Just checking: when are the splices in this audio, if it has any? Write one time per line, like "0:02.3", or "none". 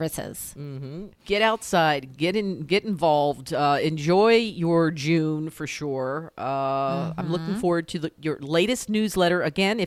0:01.1